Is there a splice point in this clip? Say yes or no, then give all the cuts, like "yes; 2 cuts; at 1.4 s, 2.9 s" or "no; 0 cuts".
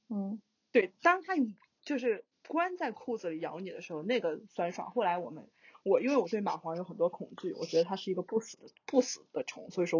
no; 0 cuts